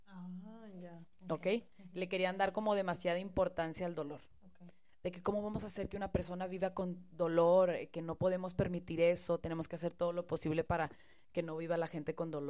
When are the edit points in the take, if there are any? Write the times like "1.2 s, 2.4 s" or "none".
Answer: 1.7 s